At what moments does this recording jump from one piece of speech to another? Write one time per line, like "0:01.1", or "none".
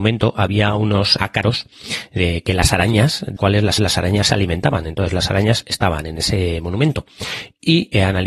0:01.2
0:03.4
0:03.8